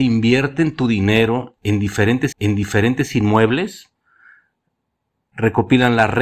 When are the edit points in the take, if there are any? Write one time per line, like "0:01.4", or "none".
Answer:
0:02.3